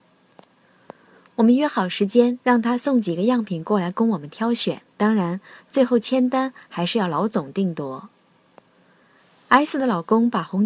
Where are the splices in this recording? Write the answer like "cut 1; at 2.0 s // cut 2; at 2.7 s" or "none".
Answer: cut 1; at 2.4 s // cut 2; at 4.9 s